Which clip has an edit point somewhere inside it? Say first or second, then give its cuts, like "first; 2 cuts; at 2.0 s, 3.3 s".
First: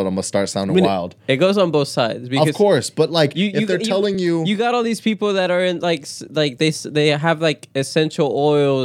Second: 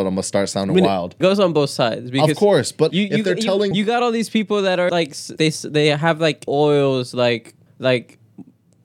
second; 7 cuts; at 1.2 s, 2.9 s, 3.7 s, 4.9 s, 5.4 s, 6.5 s, 7.7 s